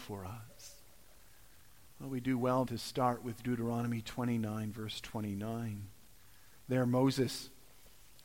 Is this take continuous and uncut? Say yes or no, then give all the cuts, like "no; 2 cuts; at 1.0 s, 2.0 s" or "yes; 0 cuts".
no; 1 cut; at 2.7 s